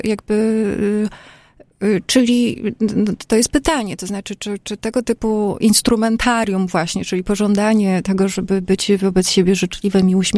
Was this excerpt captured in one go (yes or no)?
yes